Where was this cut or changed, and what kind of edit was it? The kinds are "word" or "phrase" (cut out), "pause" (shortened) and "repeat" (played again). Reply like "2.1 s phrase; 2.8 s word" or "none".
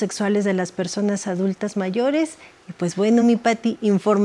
none